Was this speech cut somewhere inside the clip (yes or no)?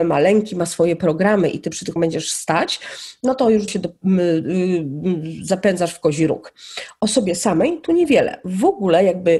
yes